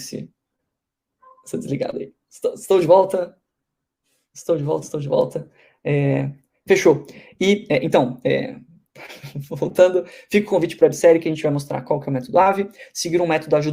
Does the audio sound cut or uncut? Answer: uncut